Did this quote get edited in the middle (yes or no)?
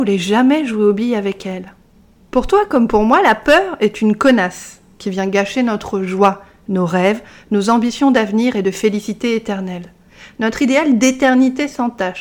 no